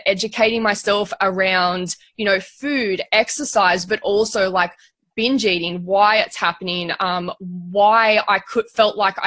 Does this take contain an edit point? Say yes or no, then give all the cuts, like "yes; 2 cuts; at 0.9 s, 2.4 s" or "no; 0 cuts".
no; 0 cuts